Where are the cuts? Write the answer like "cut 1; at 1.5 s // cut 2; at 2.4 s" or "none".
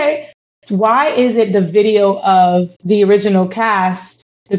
cut 1; at 2.8 s